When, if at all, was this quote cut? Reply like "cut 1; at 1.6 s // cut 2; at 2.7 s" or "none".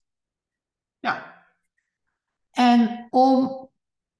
cut 1; at 3.1 s